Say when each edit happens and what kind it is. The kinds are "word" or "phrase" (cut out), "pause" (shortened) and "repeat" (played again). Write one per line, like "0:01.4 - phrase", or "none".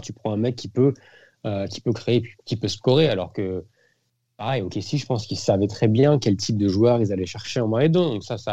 none